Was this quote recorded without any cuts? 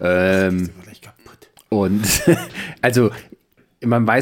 yes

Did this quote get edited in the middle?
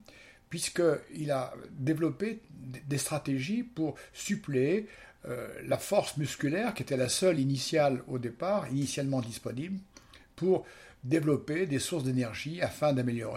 no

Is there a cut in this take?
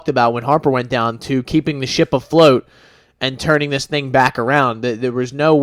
no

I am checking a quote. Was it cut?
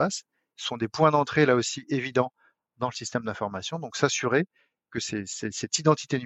no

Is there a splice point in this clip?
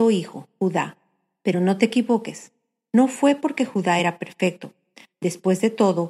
no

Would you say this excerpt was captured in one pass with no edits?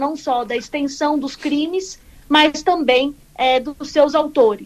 yes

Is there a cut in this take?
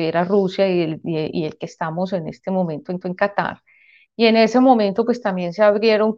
yes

